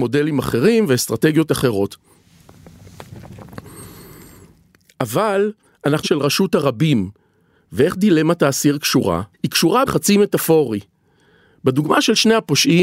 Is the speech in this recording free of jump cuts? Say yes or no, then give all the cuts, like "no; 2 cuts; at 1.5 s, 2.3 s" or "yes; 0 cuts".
no; 3 cuts; at 6.0 s, 9.3 s, 9.9 s